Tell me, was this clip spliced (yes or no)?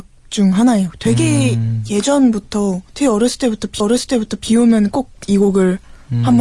yes